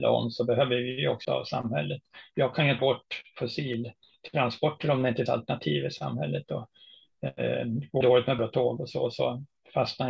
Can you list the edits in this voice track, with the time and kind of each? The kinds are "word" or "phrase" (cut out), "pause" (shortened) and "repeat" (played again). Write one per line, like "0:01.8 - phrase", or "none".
0:01.2 - word
0:02.8 - word
0:05.3 - word
0:08.0 - word
0:08.4 - word
0:08.8 - word